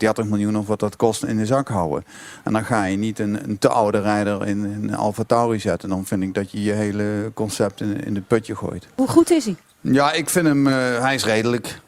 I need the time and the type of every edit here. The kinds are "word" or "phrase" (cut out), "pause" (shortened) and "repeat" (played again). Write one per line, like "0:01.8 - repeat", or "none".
none